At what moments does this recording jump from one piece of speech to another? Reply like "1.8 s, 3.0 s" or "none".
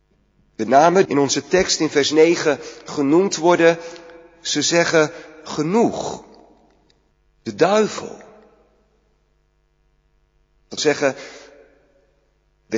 1.1 s, 7.1 s, 10.8 s